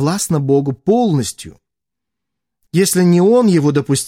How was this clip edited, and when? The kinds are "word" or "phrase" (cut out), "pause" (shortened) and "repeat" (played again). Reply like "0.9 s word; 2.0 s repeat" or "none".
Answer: none